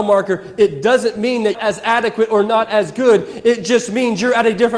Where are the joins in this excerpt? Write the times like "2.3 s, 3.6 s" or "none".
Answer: 1.5 s